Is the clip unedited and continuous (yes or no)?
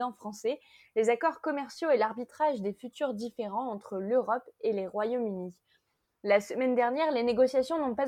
yes